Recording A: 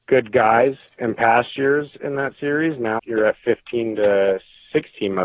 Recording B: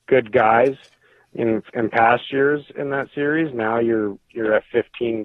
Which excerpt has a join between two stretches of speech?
A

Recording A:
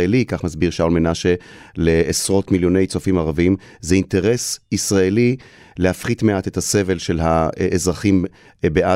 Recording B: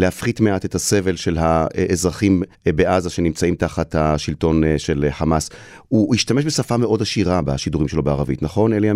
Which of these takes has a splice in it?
B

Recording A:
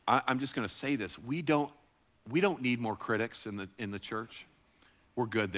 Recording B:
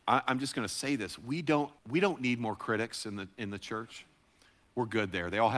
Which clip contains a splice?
B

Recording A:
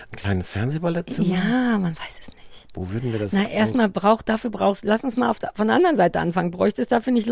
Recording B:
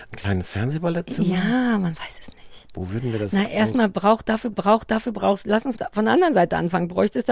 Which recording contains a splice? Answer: B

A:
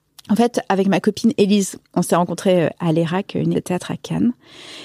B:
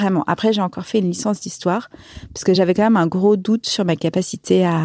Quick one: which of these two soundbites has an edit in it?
A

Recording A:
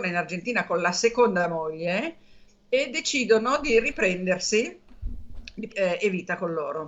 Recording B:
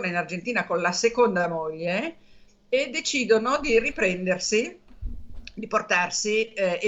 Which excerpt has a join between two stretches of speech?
A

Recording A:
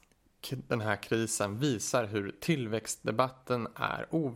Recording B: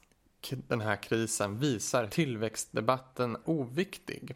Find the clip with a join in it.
B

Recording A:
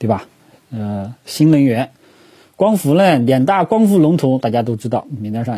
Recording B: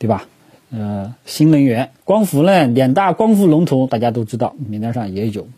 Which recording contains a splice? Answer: B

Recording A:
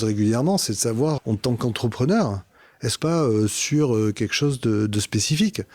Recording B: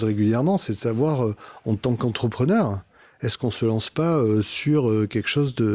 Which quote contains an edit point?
A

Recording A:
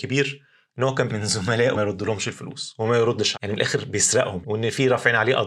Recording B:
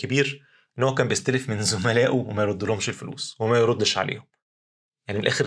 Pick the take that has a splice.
A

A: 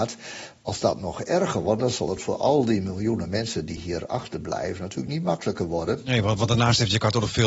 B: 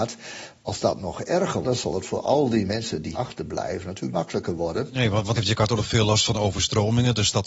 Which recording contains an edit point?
B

